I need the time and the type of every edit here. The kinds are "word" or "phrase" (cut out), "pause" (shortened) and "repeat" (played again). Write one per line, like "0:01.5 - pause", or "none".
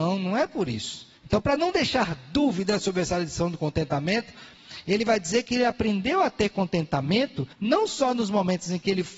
0:01.2 - pause
0:07.5 - pause